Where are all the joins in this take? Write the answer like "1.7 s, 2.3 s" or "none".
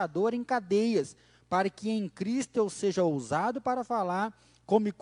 none